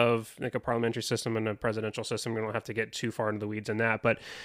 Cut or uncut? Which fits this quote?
uncut